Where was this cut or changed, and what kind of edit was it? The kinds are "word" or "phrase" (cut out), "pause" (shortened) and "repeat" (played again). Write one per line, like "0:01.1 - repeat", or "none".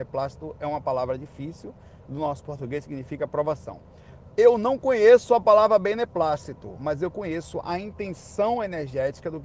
none

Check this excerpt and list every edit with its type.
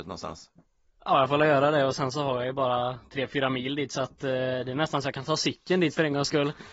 none

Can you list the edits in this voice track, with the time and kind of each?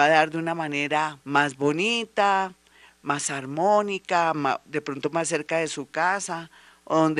0:01.2 - pause

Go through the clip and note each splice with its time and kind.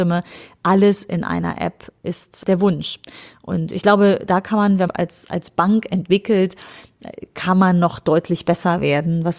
0:04.9 - phrase

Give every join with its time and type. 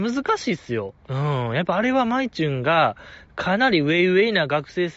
0:01.0 - pause

